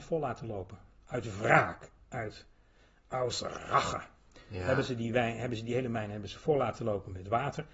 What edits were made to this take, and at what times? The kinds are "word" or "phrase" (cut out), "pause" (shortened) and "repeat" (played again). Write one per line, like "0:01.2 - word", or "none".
none